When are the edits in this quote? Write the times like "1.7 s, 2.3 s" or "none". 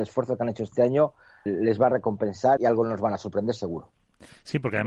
1.5 s, 2.6 s